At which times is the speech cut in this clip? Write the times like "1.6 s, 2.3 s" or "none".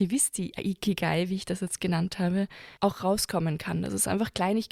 2.8 s